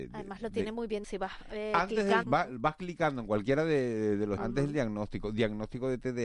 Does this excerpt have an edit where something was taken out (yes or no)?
yes